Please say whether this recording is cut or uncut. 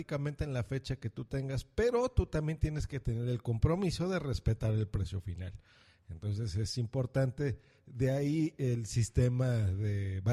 uncut